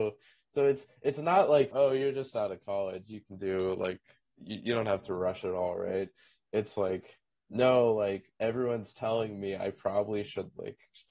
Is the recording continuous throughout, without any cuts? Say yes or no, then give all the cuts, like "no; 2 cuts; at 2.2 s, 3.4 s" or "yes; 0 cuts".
no; 1 cut; at 1.7 s